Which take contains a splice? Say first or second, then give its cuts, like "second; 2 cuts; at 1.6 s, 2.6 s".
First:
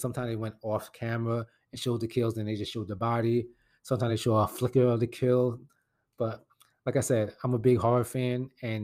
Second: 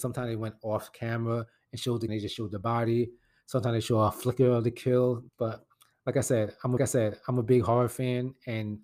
second; 3 cuts; at 2.1 s, 5.3 s, 6.8 s